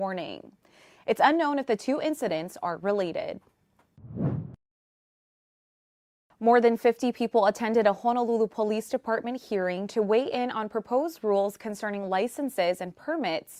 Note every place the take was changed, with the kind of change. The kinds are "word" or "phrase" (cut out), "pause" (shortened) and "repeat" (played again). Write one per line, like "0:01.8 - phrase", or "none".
none